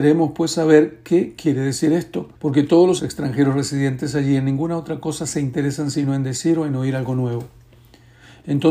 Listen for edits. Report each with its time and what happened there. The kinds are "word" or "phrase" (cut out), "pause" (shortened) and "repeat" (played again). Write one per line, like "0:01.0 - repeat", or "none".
0:02.4 - pause
0:03.0 - phrase

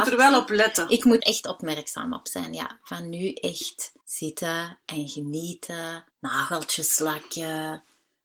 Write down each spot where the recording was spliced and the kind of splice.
0:01.2 - word
0:04.0 - pause
0:06.1 - pause

